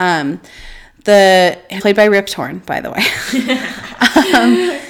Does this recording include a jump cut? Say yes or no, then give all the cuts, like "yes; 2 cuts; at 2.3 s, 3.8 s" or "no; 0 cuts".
yes; 1 cut; at 1.8 s